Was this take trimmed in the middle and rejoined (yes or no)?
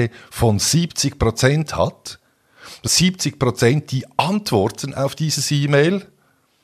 yes